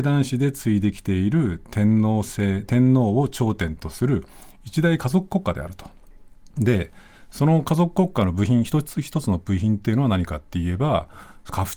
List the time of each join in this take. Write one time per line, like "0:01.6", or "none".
0:06.5

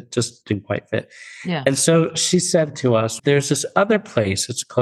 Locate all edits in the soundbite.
0:03.2

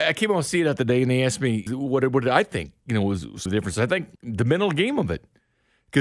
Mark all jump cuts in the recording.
0:01.7
0:03.5
0:04.2

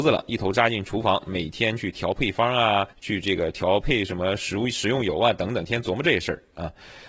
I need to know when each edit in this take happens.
0:02.9

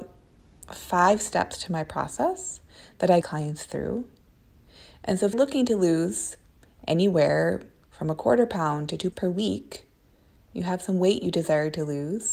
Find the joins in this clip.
0:03.2
0:05.3
0:09.1

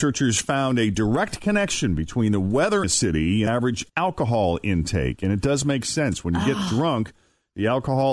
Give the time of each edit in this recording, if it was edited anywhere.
0:02.8
0:03.5
0:03.9

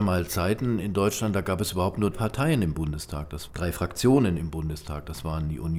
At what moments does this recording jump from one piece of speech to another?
0:02.1
0:03.5

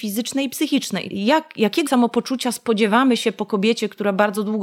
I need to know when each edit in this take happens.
0:01.1
0:01.9

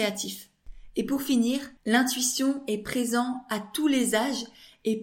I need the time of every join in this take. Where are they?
0:01.8

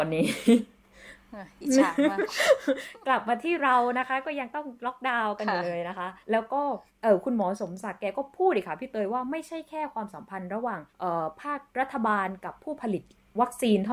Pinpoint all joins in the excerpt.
0:06.2
0:06.9
0:10.9
0:11.7

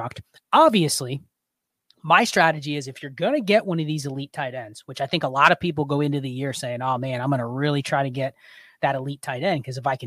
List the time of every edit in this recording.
none

